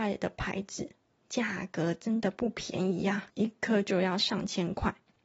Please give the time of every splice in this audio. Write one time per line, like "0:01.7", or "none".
0:03.3